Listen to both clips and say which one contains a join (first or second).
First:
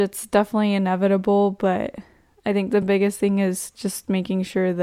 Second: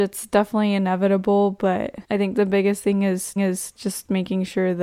second